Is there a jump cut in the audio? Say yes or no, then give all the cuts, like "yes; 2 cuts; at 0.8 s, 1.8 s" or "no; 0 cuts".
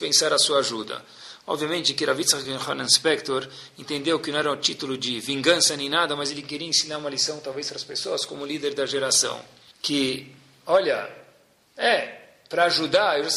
no; 0 cuts